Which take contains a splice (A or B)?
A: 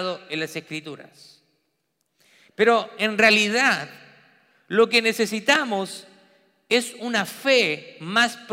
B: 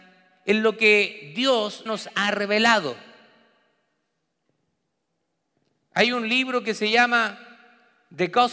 B